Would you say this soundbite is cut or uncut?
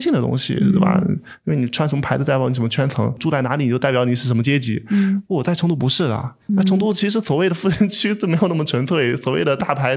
cut